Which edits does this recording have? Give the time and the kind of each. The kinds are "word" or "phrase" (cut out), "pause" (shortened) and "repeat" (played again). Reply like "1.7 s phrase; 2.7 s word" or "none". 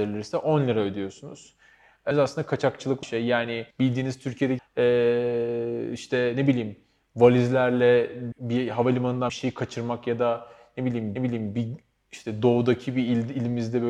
2.1 s phrase; 3.0 s word; 3.7 s pause; 4.6 s phrase; 8.3 s word; 9.3 s word; 11.2 s repeat